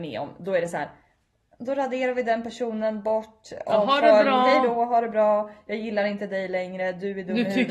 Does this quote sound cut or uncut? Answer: uncut